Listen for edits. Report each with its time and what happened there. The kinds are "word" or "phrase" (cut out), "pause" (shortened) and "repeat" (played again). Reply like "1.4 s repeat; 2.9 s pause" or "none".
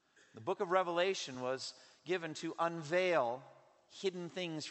none